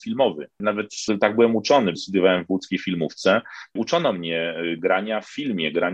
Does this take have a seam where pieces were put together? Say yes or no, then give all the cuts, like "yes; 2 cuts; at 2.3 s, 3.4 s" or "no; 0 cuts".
yes; 1 cut; at 3.8 s